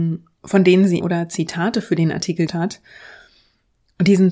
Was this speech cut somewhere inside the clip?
yes; 2 cuts; at 1.0 s, 2.5 s

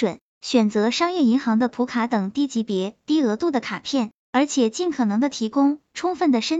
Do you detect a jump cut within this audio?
no; 0 cuts

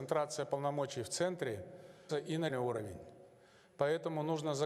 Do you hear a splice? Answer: yes; 2 cuts; at 2.1 s, 2.5 s

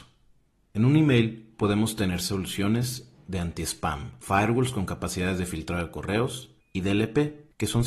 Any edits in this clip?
yes; 1 cut; at 6.6 s

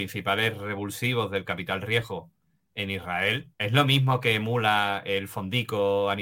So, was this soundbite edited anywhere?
yes; 1 cut; at 3.5 s

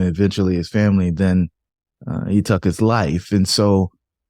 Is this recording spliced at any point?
no; 0 cuts

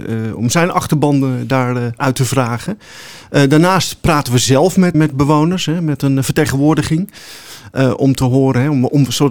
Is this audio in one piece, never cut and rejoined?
no; 2 cuts; at 2.0 s, 4.9 s

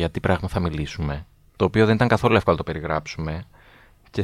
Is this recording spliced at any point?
no; 0 cuts

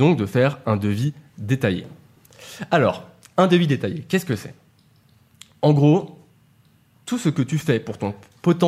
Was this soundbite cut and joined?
no; 0 cuts

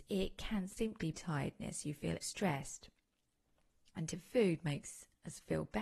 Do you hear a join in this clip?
yes; 3 cuts; at 1.1 s, 2.2 s, 4.1 s

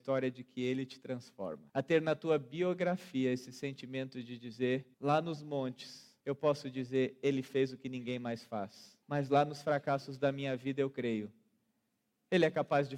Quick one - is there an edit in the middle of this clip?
yes; 4 cuts; at 1.7 s, 4.9 s, 6.2 s, 9.0 s

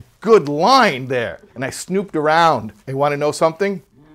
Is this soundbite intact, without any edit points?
no; 2 cuts; at 1.5 s, 2.8 s

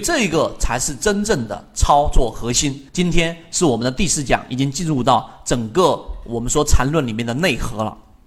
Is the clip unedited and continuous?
no; 1 cut; at 2.9 s

